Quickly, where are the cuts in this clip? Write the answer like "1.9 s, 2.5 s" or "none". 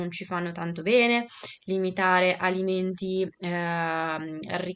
none